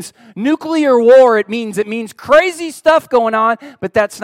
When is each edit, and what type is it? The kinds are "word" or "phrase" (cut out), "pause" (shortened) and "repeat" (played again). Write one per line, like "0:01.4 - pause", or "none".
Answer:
0:01.7 - word